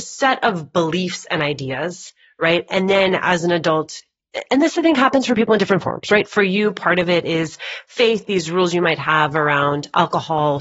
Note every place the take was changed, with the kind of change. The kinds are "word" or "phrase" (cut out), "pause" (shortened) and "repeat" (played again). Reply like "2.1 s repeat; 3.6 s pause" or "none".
none